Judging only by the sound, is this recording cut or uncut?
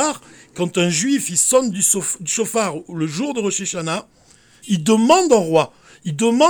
uncut